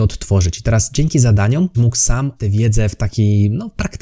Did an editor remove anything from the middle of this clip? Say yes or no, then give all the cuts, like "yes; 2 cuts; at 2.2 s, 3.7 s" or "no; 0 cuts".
yes; 2 cuts; at 1.7 s, 2.4 s